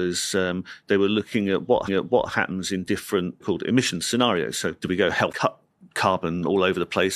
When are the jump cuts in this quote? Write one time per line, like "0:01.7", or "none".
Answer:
0:01.9
0:03.4
0:05.3